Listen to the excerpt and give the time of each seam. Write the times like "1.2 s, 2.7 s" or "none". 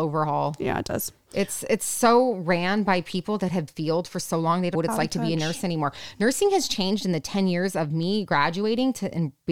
3.7 s, 4.7 s